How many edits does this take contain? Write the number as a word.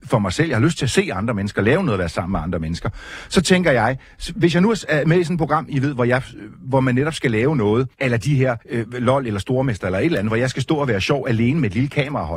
two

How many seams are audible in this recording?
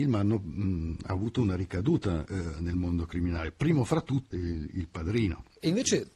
one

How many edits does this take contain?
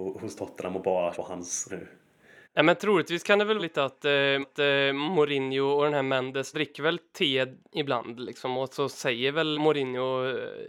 seven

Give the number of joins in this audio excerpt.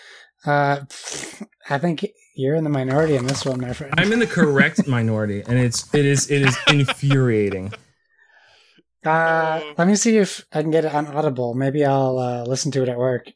zero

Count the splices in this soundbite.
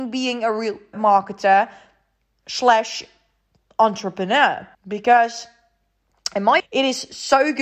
three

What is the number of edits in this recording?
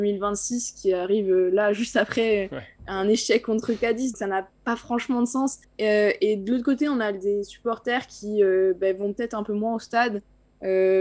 two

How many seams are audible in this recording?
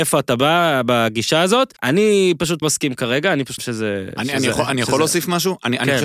three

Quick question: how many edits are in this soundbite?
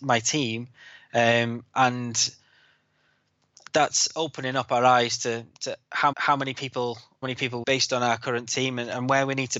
three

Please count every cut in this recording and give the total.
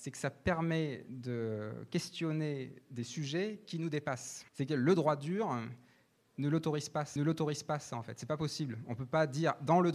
two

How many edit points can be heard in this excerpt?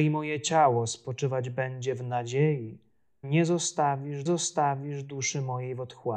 two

